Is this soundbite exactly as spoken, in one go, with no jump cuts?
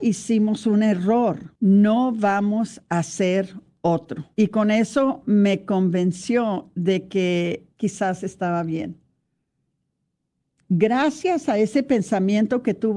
no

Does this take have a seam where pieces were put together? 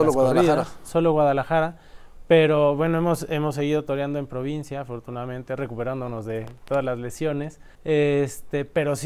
yes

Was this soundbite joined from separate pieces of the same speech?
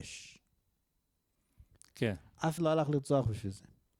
yes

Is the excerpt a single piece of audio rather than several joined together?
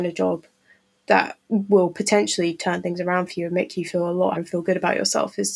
no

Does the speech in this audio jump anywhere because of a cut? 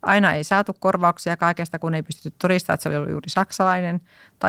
no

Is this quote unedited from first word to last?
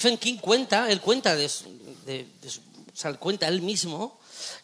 yes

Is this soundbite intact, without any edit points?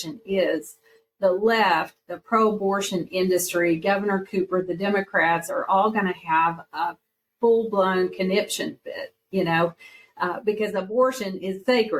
yes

